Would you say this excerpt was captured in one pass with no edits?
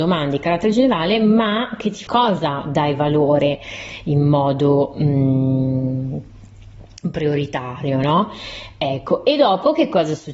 no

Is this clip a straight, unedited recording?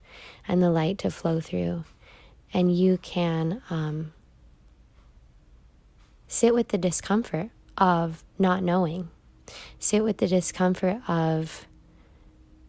yes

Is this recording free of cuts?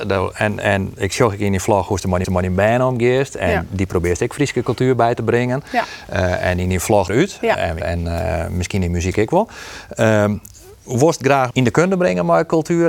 no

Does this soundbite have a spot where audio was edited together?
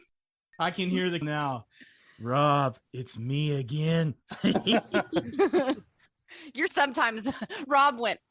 yes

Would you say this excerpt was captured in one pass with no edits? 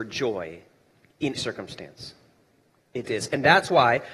no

